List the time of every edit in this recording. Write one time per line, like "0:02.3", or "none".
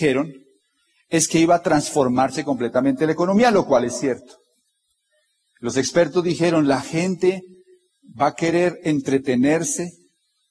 none